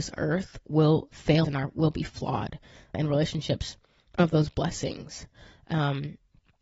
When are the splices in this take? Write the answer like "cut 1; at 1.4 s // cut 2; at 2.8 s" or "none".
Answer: cut 1; at 1.4 s // cut 2; at 2.9 s // cut 3; at 4.2 s